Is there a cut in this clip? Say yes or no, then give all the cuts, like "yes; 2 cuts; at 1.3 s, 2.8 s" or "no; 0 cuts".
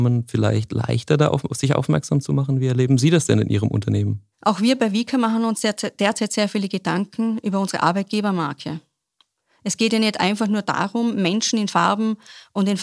yes; 2 cuts; at 4.3 s, 11.7 s